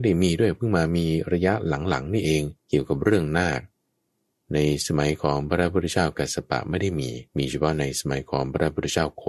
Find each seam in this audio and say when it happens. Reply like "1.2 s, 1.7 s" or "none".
2.6 s, 7.3 s